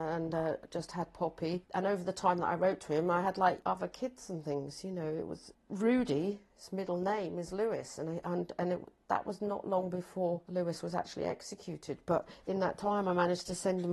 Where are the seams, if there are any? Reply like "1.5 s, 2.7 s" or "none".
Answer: none